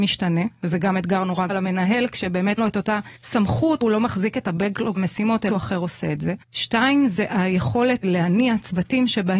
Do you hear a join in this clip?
yes; 8 cuts; at 1.5 s, 2.6 s, 3.2 s, 3.8 s, 5.0 s, 5.5 s, 6.4 s, 8.0 s

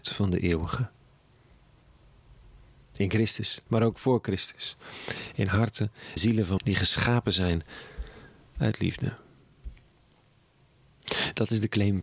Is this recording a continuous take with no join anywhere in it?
no; 3 cuts; at 3.7 s, 6.2 s, 6.6 s

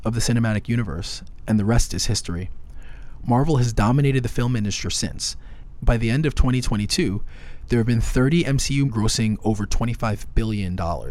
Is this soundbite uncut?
no; 2 cuts; at 4.8 s, 8.9 s

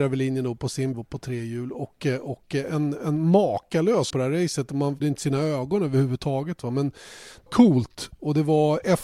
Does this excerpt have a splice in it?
yes; 4 cuts; at 0.9 s, 4.1 s, 5.0 s, 7.5 s

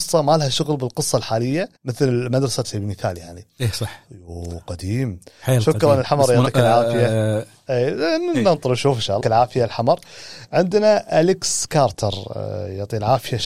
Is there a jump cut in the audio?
yes; 3 cuts; at 1.8 s, 2.6 s, 9.2 s

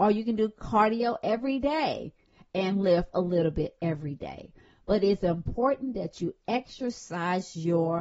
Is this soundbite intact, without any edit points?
yes; 0 cuts

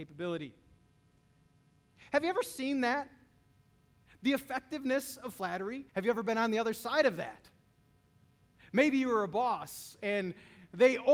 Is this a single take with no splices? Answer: no; 1 cut; at 5.9 s

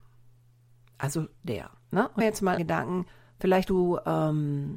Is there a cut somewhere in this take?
yes; 4 cuts; at 1.4 s, 2.2 s, 2.6 s, 3.7 s

